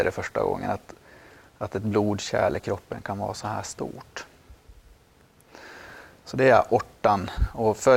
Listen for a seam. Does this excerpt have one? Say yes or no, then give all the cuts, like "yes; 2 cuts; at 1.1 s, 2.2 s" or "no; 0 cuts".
no; 0 cuts